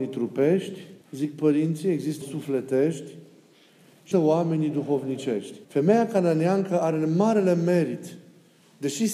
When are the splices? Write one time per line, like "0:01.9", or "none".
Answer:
0:01.0
0:02.2
0:04.1
0:05.6